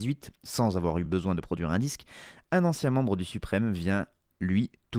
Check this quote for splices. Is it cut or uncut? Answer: uncut